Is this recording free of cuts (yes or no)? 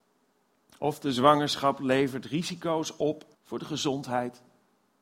no